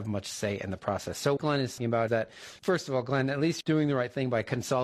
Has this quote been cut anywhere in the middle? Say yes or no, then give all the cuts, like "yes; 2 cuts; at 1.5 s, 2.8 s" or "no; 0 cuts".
yes; 5 cuts; at 1.4 s, 1.8 s, 2.1 s, 2.6 s, 3.6 s